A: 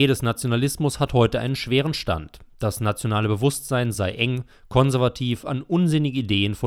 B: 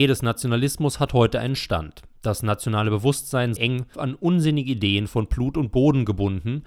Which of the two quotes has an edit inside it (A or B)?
B